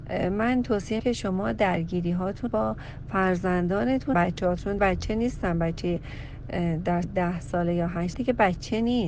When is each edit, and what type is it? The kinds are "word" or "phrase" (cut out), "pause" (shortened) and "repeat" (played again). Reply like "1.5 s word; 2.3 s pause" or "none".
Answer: 1.0 s word; 2.5 s word; 4.1 s word; 4.8 s word; 7.0 s word; 8.1 s word

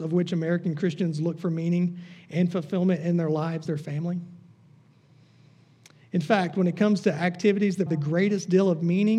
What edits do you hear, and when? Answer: 3.7 s word; 7.9 s word

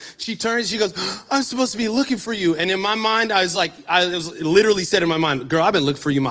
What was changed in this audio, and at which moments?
none

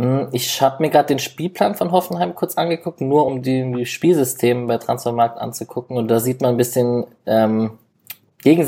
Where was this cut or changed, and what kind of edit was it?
none

